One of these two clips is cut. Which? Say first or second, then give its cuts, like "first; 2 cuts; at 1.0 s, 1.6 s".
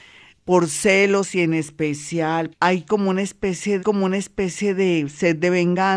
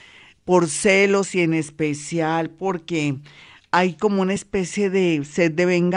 first; 2 cuts; at 2.5 s, 3.8 s